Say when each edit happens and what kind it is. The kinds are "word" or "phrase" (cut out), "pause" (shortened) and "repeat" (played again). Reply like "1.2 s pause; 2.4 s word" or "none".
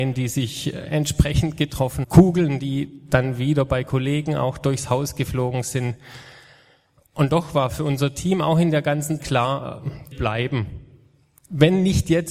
2.0 s word; 9.2 s word; 10.1 s word